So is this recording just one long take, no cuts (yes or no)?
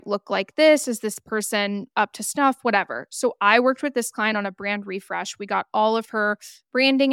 yes